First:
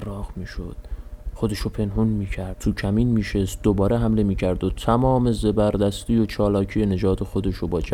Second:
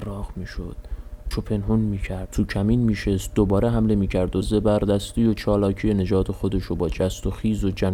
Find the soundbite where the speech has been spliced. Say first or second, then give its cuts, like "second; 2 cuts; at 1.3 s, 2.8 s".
second; 2 cuts; at 1.3 s, 4.4 s